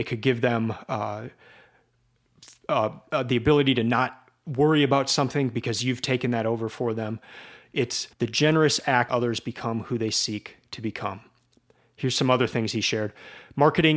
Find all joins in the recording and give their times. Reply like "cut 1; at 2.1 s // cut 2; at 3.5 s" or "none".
cut 1; at 8.1 s // cut 2; at 9.1 s